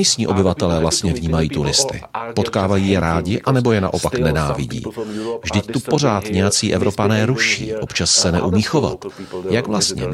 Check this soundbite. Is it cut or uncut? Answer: uncut